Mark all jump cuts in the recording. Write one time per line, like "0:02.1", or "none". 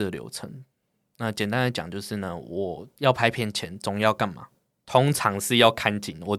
none